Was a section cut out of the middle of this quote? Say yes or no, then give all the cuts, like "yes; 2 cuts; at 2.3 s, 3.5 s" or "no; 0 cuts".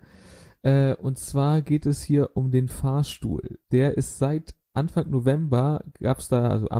yes; 1 cut; at 3.6 s